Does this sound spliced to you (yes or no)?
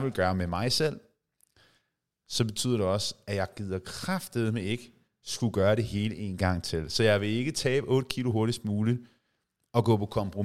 no